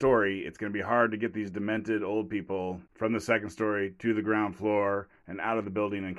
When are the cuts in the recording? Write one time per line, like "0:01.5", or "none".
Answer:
0:02.9